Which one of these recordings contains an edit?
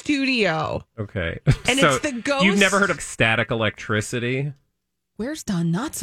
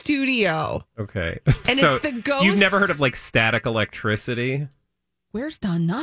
first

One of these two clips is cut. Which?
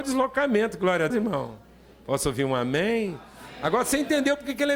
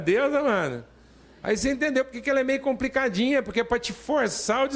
first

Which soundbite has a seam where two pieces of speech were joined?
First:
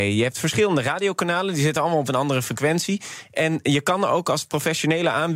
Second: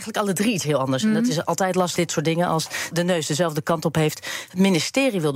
second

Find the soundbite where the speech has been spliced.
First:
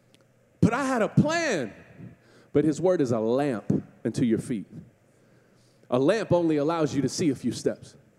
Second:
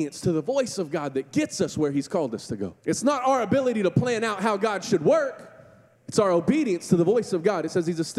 second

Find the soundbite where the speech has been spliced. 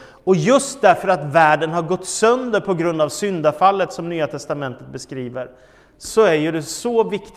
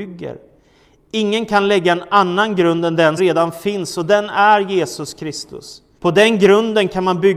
second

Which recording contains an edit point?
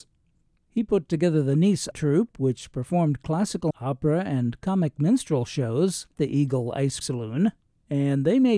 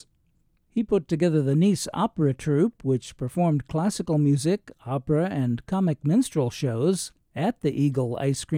first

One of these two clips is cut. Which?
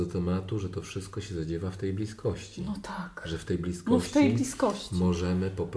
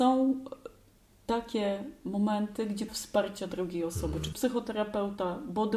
second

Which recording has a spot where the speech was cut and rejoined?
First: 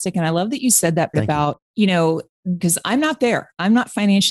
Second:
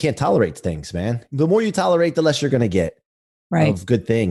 first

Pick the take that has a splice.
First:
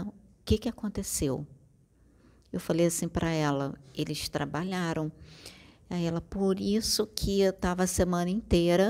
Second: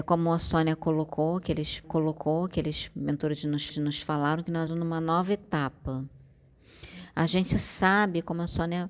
second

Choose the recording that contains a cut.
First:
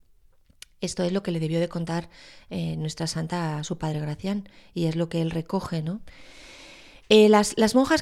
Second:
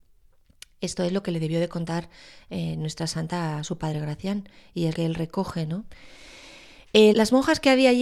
second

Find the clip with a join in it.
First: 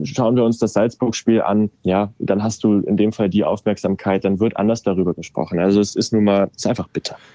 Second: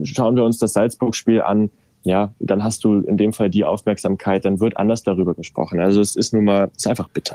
first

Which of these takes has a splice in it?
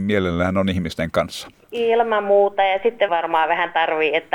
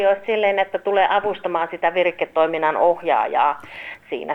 first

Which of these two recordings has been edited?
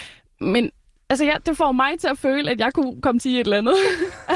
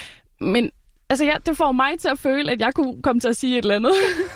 first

